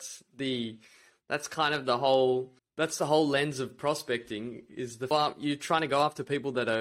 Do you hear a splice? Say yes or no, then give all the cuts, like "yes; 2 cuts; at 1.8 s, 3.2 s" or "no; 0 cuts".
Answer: yes; 2 cuts; at 2.6 s, 5.1 s